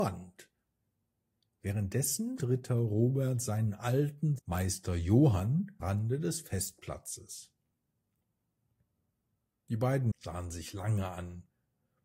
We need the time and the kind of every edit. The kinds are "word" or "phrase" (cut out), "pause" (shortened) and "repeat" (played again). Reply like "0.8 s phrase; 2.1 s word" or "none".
2.4 s word; 4.4 s word; 5.8 s word; 10.1 s word